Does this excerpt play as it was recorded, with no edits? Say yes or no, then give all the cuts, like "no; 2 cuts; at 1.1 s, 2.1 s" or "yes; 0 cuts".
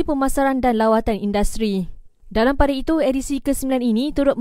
yes; 0 cuts